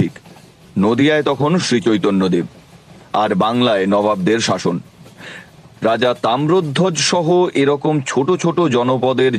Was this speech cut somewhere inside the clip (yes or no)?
no